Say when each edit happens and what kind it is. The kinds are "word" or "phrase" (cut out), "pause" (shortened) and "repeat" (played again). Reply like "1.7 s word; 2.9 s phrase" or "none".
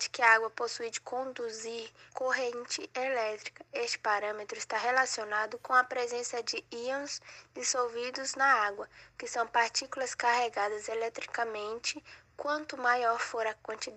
2.1 s pause